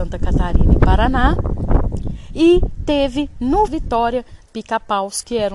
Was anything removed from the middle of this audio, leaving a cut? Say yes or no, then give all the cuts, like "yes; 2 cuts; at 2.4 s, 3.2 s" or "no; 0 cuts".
yes; 2 cuts; at 3.7 s, 4.5 s